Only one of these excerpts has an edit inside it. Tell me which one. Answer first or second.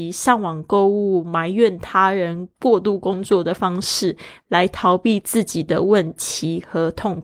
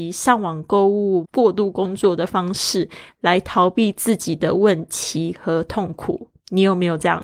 second